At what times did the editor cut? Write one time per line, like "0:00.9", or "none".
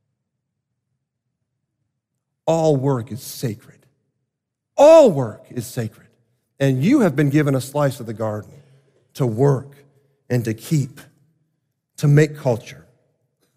none